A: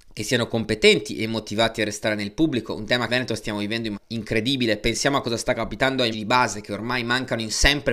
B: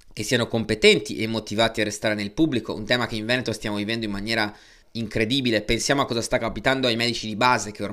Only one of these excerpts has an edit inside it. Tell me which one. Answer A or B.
A